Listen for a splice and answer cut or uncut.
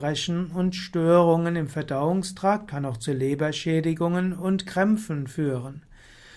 uncut